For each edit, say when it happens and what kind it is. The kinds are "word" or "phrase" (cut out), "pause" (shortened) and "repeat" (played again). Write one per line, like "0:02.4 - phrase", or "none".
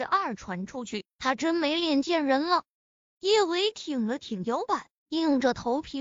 none